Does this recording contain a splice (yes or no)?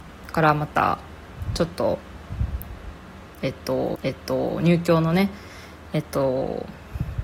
yes